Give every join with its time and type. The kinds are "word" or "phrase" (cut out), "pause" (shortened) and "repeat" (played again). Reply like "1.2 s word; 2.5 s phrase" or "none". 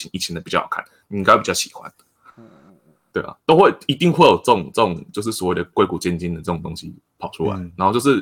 none